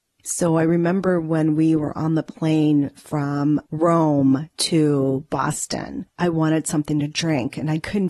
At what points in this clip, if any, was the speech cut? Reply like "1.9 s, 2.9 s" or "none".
3.7 s